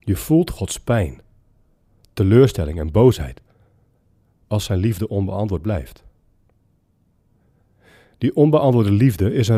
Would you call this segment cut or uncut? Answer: uncut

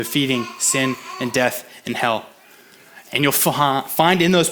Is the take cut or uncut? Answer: uncut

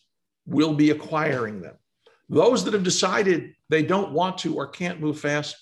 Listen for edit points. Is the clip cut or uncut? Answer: uncut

